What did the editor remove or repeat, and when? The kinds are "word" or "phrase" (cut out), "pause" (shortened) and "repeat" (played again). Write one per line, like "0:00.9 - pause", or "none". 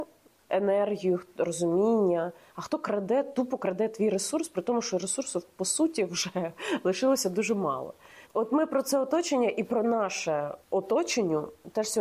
0:08.2 - pause
0:10.6 - pause

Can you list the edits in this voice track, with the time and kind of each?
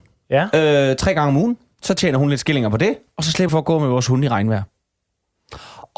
0:03.5 - word

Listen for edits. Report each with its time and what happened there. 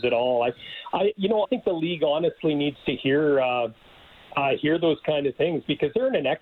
0:01.4 - word

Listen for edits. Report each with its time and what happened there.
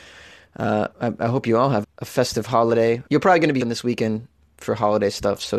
0:00.9 - pause
0:01.8 - word
0:03.1 - pause
0:03.6 - word

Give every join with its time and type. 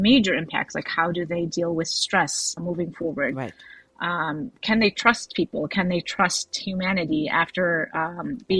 0:02.6 - word

